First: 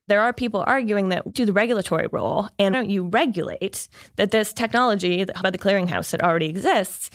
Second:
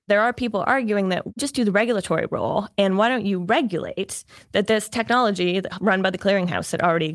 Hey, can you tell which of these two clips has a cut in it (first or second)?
first